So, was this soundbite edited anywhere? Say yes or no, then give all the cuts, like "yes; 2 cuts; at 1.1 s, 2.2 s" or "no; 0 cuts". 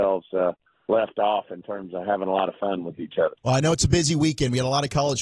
yes; 1 cut; at 3.4 s